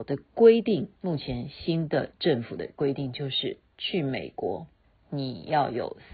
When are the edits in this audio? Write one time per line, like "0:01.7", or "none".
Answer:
0:01.0
0:04.8